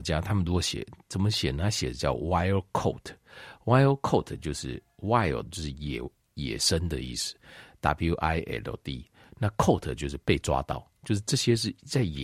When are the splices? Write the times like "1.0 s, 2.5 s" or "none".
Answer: none